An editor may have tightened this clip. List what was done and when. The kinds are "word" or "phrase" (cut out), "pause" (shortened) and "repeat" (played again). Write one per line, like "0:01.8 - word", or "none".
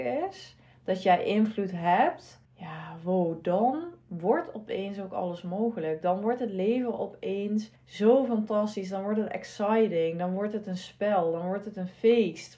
0:02.4 - pause
0:07.8 - pause